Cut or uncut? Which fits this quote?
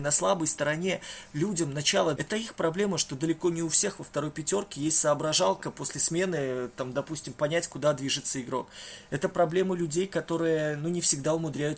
cut